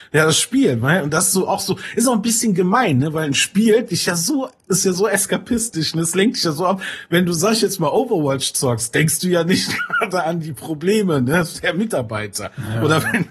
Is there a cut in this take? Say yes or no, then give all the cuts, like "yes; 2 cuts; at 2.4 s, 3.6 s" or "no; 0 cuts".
no; 0 cuts